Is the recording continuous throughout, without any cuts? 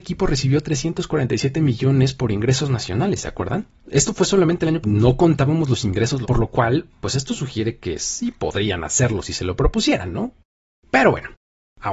no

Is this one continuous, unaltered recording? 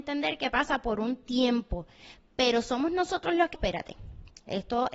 no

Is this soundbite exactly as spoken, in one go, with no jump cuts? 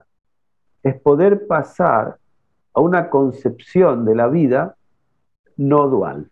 yes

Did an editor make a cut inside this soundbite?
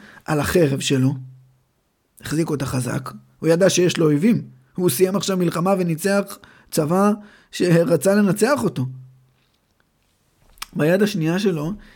no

